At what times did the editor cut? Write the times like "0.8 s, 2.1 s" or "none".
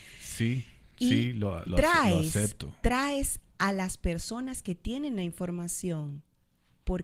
none